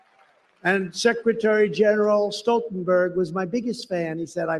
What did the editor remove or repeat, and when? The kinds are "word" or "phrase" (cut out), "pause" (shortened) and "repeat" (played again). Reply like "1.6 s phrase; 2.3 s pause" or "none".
none